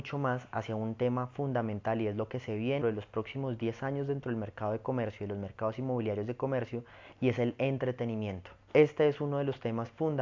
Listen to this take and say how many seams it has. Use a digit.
2